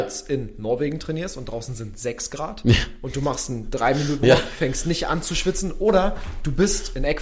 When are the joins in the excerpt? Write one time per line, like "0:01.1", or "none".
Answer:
0:04.2